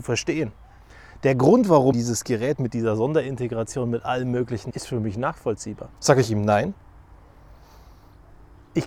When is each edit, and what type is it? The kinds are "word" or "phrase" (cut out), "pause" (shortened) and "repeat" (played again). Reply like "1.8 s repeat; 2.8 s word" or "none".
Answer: 1.9 s word; 4.7 s phrase; 5.9 s pause

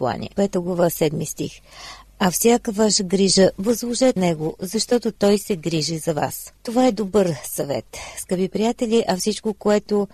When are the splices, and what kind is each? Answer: 4.2 s word; 6.6 s pause

